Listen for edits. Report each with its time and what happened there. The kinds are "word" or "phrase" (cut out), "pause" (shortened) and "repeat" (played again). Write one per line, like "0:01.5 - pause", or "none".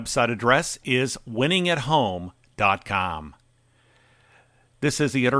none